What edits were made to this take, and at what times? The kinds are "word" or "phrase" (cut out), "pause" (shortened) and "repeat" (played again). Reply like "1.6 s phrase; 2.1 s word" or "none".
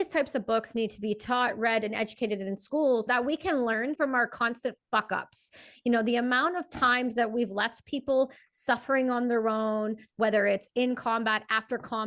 3.1 s word; 3.9 s word